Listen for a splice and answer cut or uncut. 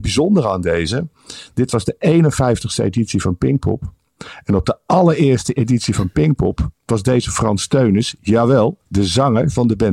cut